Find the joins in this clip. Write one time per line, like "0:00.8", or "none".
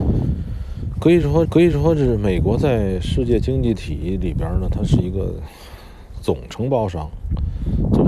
0:01.4